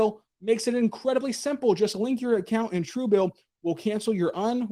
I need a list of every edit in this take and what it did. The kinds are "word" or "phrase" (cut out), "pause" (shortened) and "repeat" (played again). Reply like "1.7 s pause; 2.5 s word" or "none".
none